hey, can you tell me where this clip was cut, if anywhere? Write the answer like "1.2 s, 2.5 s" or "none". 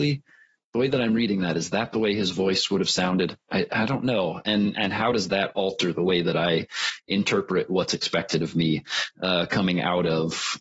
none

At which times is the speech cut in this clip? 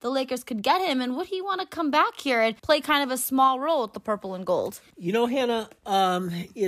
2.6 s, 4.9 s

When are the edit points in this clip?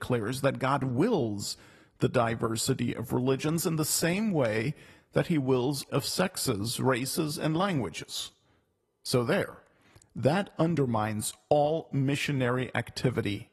5.9 s

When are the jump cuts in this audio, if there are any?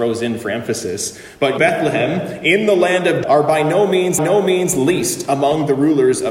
1.6 s, 3.2 s, 4.2 s

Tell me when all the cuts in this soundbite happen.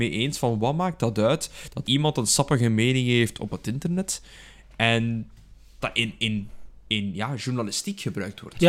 1.8 s, 5.8 s

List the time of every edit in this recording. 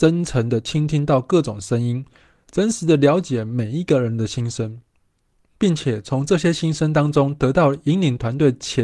none

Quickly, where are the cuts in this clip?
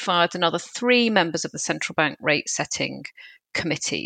none

